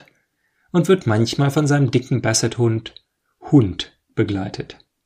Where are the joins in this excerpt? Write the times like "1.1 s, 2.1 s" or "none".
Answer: none

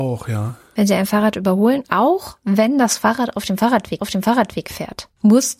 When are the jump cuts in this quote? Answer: 1.8 s, 4.0 s

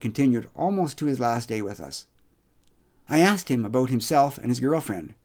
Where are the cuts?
none

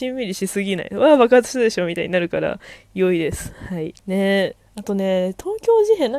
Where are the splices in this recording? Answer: 4.0 s

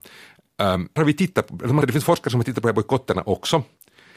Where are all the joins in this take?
1.0 s, 1.8 s

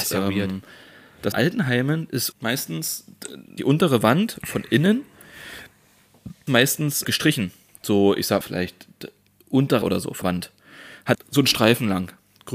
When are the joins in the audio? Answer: 1.3 s, 2.3 s, 3.6 s, 6.5 s, 7.0 s, 8.4 s, 9.8 s, 10.2 s, 11.1 s

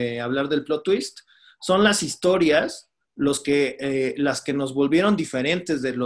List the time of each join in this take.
none

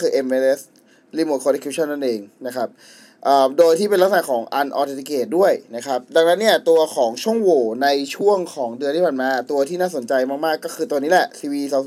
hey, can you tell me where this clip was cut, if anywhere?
2.3 s

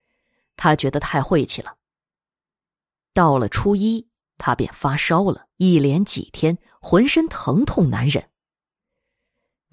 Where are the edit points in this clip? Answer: 5.5 s

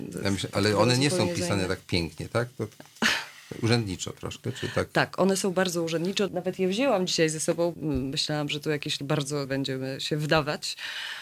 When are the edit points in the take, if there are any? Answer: 6.3 s, 7.7 s, 9.0 s, 9.4 s

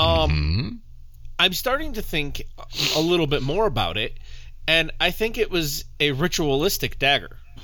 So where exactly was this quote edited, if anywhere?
none

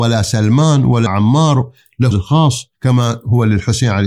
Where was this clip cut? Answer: 1.1 s, 2.1 s, 2.7 s

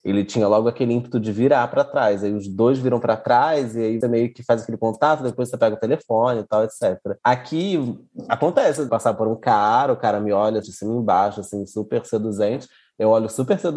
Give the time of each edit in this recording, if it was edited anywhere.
4.0 s, 7.2 s, 8.9 s, 10.6 s

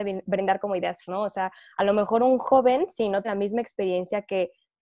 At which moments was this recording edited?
1.1 s, 3.2 s

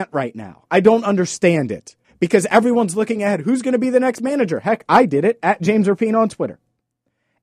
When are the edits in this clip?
2.0 s

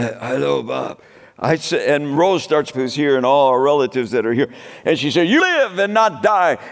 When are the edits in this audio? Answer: 2.7 s, 5.4 s

